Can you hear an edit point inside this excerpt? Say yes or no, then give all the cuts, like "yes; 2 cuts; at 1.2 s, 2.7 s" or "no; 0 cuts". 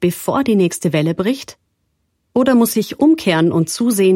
no; 0 cuts